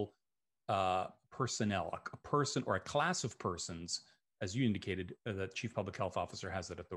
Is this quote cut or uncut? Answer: uncut